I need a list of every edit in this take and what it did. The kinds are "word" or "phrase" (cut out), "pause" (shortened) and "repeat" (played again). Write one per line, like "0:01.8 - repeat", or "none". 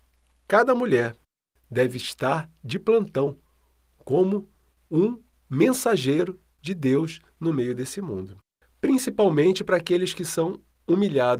none